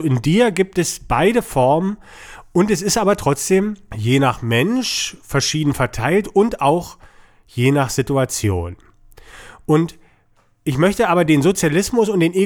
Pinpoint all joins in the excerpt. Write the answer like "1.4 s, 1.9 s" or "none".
none